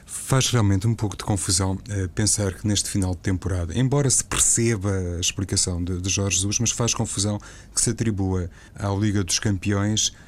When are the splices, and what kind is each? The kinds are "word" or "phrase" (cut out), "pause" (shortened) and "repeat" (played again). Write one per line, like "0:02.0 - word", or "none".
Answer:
0:08.7 - pause